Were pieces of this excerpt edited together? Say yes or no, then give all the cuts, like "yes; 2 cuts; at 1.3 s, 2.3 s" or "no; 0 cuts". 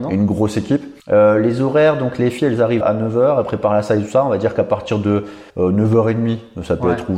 yes; 3 cuts; at 1.0 s, 2.8 s, 5.5 s